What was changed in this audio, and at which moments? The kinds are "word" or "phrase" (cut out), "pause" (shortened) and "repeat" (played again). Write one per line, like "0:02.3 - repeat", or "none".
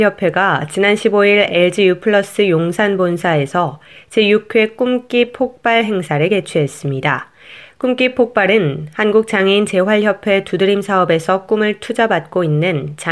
none